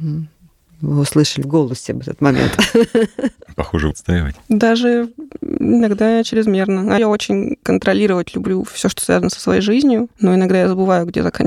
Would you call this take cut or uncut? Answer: cut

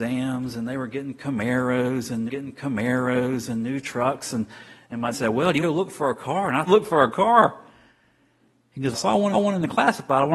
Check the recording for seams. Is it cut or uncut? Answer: cut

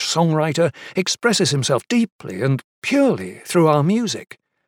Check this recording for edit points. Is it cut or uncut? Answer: uncut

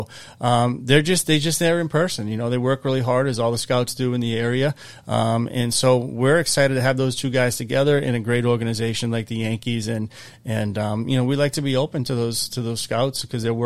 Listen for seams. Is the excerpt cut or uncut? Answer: uncut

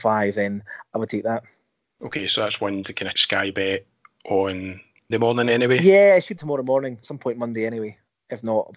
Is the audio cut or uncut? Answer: cut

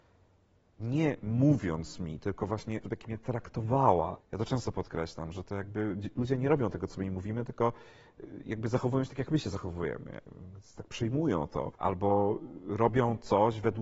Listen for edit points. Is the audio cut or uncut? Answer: cut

